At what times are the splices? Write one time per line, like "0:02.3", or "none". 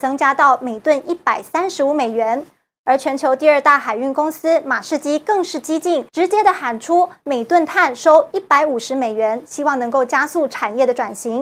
0:06.1